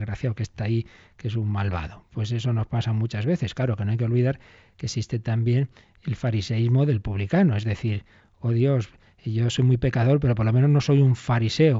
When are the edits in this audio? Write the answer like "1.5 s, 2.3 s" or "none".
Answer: none